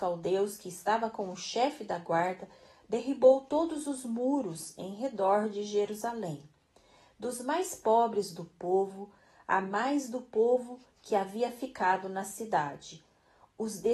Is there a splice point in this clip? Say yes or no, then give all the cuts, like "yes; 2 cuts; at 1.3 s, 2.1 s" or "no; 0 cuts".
no; 0 cuts